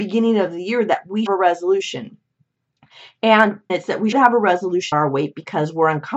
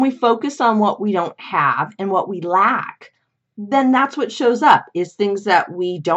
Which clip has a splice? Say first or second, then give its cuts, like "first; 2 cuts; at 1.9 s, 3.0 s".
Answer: first; 4 cuts; at 1.3 s, 3.7 s, 4.1 s, 4.9 s